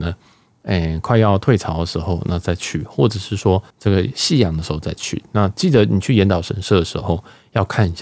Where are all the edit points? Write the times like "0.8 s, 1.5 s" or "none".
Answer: 3.7 s

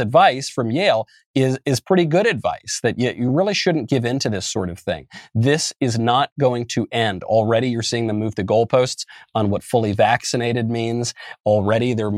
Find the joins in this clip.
none

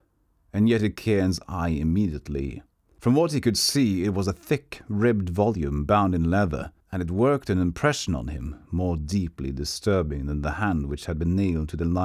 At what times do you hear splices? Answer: 1.0 s, 2.7 s, 6.8 s

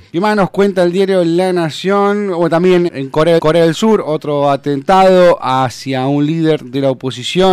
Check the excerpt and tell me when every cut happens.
2.9 s, 3.4 s

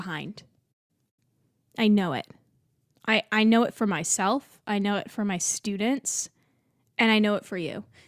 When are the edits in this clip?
none

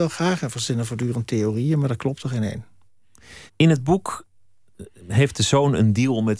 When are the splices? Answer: 3.5 s

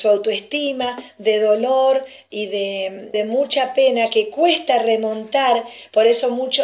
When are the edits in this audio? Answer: 3.1 s

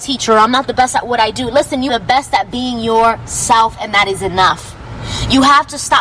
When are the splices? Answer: 1.9 s

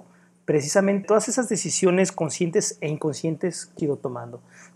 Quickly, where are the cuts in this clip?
1.0 s, 3.8 s

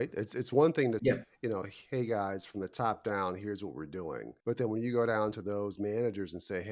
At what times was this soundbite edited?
1.0 s, 4.4 s

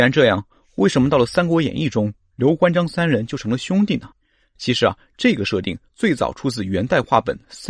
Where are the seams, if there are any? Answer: 4.2 s

